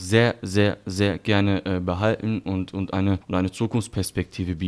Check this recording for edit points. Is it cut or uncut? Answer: cut